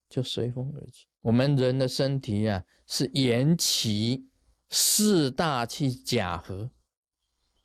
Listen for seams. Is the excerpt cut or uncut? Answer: cut